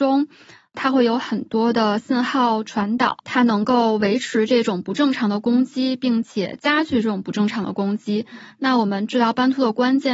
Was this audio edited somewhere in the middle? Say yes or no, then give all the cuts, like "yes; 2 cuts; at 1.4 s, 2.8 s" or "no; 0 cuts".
yes; 1 cut; at 3.2 s